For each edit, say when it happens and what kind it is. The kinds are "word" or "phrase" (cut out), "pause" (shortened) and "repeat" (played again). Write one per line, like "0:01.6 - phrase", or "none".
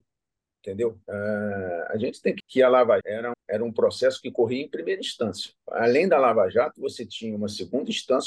0:01.0 - pause
0:02.4 - word
0:03.0 - word
0:03.3 - word
0:05.6 - pause